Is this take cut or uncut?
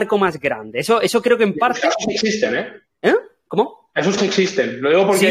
cut